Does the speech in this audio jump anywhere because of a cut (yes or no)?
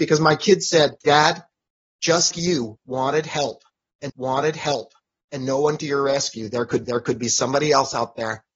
yes